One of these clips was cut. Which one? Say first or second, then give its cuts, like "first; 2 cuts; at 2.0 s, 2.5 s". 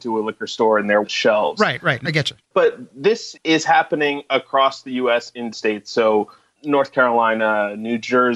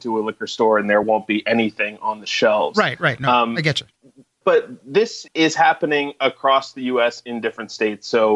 first; 4 cuts; at 1.0 s, 2.0 s, 2.4 s, 5.5 s